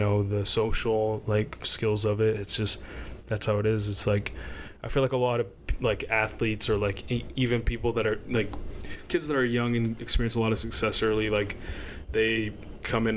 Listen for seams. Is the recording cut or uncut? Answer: uncut